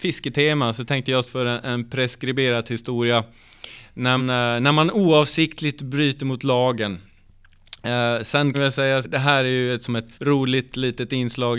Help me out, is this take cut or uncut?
cut